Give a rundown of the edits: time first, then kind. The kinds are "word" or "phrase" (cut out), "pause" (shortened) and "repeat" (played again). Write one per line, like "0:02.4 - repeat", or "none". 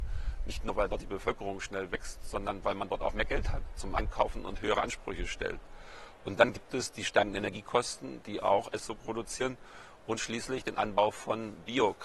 0:08.8 - phrase